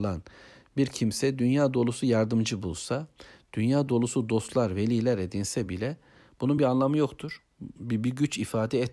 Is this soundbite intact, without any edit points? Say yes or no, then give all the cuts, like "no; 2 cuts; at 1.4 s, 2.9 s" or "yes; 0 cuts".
yes; 0 cuts